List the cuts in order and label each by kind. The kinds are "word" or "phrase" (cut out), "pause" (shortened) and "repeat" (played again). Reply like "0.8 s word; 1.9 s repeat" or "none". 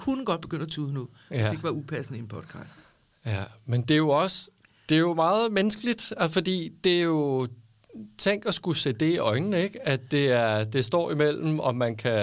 none